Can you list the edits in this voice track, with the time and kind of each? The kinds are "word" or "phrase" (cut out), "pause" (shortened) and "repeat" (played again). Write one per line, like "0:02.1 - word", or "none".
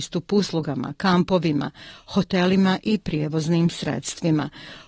none